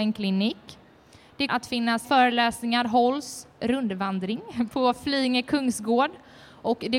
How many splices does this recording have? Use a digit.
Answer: 3